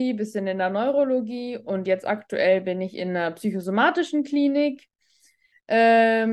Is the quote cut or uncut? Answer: uncut